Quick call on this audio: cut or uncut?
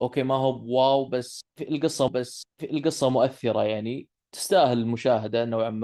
cut